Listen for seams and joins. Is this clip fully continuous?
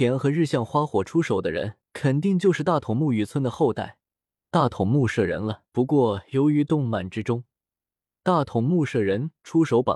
no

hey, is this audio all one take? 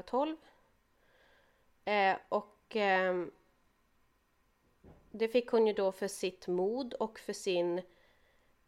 yes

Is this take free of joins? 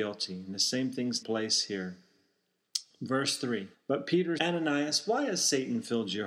no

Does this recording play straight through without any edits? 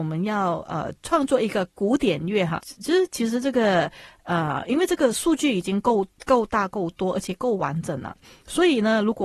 no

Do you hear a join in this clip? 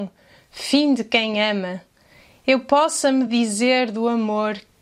no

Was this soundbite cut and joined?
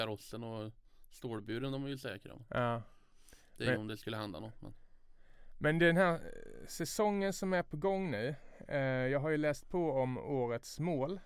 no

